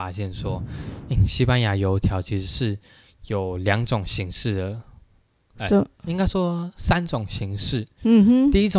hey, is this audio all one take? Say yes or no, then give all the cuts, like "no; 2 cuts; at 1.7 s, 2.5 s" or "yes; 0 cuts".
yes; 0 cuts